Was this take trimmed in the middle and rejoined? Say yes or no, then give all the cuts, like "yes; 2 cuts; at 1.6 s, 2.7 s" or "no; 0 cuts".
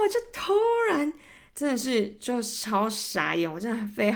no; 0 cuts